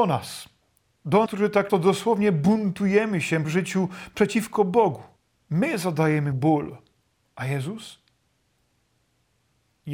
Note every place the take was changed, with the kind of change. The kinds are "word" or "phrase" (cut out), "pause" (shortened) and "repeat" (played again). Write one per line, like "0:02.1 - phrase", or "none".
0:01.3 - word
0:01.7 - word
0:03.4 - phrase
0:05.2 - pause
0:06.3 - word
0:07.2 - pause

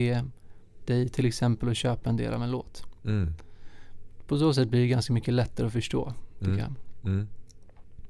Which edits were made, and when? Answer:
none

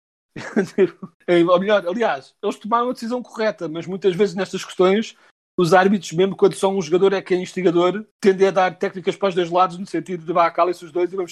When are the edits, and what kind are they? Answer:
0:01.1 - pause
0:08.1 - pause

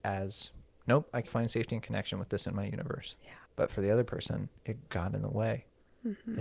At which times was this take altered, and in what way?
0:01.3 - word
0:03.5 - pause

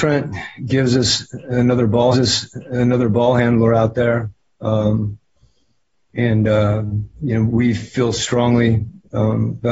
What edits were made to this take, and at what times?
0:02.1 - repeat
0:06.1 - phrase
0:07.1 - pause
0:07.5 - word

